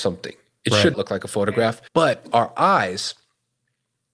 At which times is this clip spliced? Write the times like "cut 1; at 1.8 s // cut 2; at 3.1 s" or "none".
cut 1; at 0.9 s // cut 2; at 1.9 s